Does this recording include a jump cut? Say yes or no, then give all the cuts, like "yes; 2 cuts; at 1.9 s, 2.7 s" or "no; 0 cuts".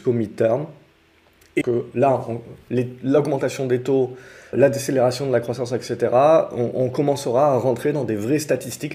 yes; 2 cuts; at 1.6 s, 4.5 s